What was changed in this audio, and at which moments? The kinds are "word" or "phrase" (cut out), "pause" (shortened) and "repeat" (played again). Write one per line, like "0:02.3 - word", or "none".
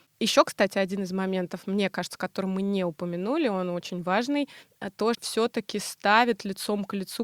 0:05.1 - phrase